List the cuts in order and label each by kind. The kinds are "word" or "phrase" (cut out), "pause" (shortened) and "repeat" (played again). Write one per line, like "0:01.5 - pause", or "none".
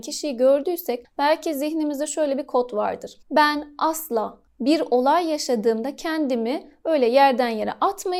0:03.2 - pause
0:04.5 - pause